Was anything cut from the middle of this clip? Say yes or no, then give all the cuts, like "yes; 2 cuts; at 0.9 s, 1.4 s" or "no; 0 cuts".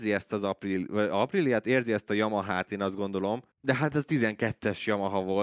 yes; 1 cut; at 3.5 s